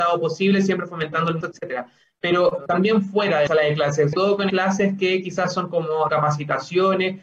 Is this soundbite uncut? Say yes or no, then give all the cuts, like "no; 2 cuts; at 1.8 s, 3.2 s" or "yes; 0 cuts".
no; 6 cuts; at 1.4 s, 2.7 s, 3.5 s, 4.1 s, 4.5 s, 6.1 s